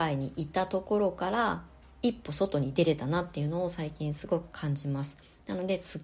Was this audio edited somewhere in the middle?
yes; 1 cut; at 1.8 s

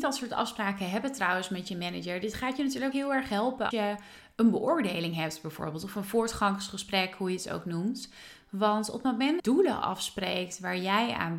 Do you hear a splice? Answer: yes; 3 cuts; at 2.9 s, 3.7 s, 9.4 s

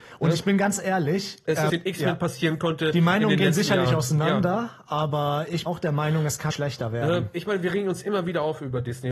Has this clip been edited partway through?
yes; 3 cuts; at 1.7 s, 5.7 s, 6.5 s

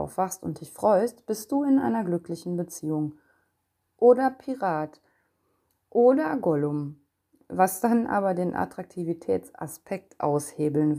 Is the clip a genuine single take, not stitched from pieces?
yes; 0 cuts

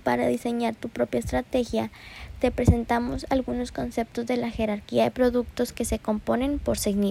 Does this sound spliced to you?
no; 0 cuts

